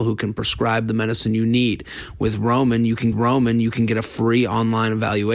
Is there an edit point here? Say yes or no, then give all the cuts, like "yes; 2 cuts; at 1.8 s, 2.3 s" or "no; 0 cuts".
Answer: yes; 1 cut; at 3.1 s